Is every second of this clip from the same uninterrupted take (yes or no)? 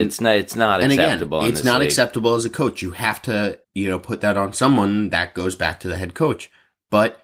no